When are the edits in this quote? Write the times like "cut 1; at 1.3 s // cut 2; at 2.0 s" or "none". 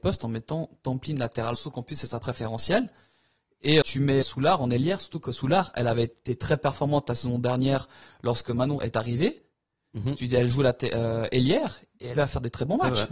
cut 1; at 1.5 s // cut 2; at 2.2 s // cut 3; at 3.8 s // cut 4; at 4.2 s // cut 5; at 8.8 s // cut 6; at 12.2 s